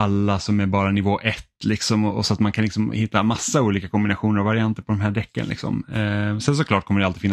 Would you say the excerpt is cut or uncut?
uncut